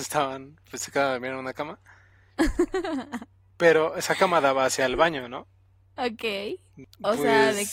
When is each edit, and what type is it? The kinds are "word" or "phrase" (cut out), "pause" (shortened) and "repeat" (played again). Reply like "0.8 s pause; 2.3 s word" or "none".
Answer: none